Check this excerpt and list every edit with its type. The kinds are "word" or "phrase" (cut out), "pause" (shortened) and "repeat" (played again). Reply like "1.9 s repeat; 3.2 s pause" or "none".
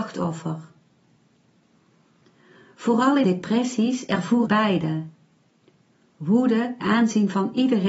3.2 s word; 4.5 s word; 6.8 s word